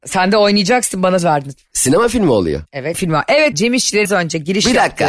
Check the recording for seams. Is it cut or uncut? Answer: cut